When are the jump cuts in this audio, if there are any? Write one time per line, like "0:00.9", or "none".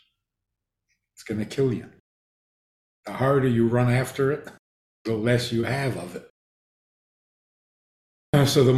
none